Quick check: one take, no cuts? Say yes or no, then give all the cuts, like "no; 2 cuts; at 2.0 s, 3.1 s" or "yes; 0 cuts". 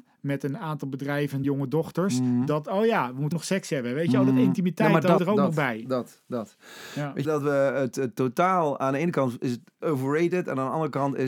no; 5 cuts; at 1.4 s, 3.3 s, 5.2 s, 7.2 s, 9.8 s